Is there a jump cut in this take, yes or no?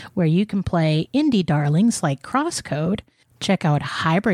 no